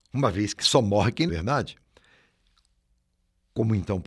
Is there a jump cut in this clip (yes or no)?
yes